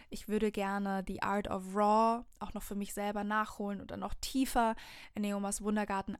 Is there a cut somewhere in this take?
no; 0 cuts

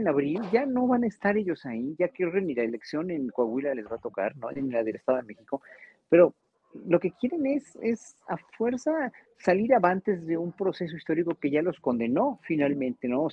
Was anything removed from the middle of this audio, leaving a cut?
no; 0 cuts

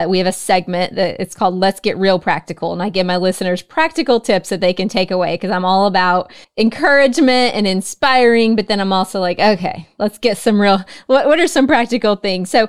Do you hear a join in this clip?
yes; 1 cut; at 6.4 s

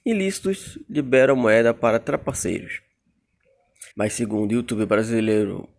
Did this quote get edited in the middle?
yes; 1 cut; at 3.9 s

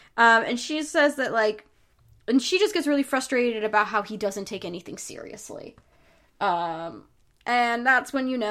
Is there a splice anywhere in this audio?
no; 0 cuts

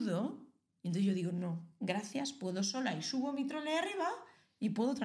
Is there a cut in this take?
no; 0 cuts

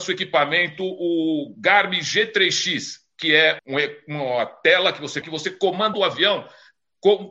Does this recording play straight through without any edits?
no; 3 cuts; at 3.6 s, 5.2 s, 5.9 s

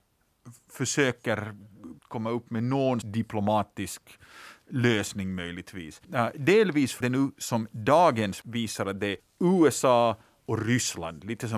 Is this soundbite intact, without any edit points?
no; 6 cuts; at 2.0 s, 3.0 s, 6.0 s, 7.0 s, 8.4 s, 9.2 s

